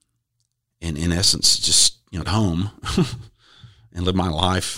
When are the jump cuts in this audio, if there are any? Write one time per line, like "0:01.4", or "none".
0:02.2